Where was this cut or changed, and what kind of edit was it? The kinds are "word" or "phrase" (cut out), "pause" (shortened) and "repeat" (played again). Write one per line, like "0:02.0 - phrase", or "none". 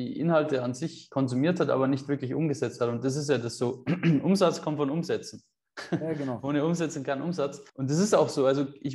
0:07.7 - pause